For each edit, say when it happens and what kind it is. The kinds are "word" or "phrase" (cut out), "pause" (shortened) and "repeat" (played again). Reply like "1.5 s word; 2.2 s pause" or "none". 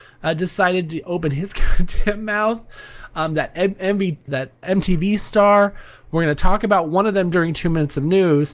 4.3 s word; 4.6 s word